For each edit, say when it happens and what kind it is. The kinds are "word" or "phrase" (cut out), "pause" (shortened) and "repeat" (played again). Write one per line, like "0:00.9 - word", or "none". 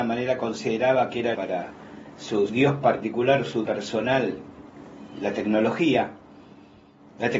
0:01.3 - word
0:02.5 - word
0:03.7 - word